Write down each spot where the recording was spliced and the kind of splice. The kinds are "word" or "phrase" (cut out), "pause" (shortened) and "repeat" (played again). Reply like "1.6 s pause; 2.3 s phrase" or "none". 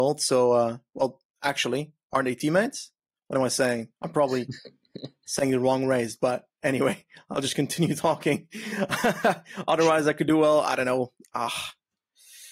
1.3 s pause